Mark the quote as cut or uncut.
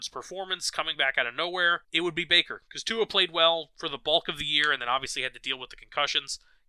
cut